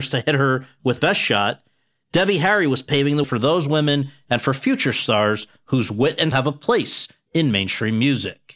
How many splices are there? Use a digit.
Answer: 3